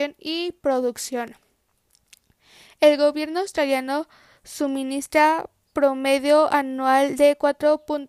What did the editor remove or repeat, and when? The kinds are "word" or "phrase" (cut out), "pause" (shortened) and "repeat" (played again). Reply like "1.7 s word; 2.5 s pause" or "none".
none